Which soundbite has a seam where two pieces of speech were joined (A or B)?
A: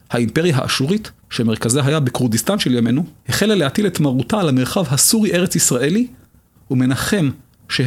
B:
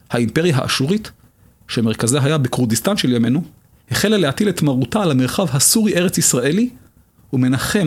A